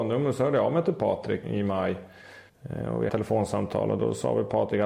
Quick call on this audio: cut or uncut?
cut